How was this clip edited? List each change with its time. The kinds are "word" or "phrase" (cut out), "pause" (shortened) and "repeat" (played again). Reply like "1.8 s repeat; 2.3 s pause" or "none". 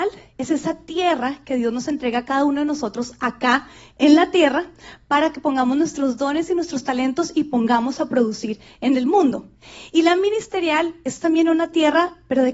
none